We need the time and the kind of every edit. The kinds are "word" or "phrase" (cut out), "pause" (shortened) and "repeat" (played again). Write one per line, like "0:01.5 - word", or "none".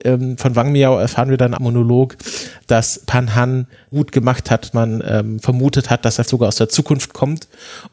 0:01.6 - phrase
0:03.9 - phrase
0:04.7 - word
0:06.2 - word